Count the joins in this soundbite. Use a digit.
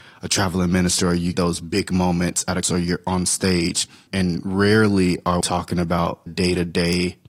5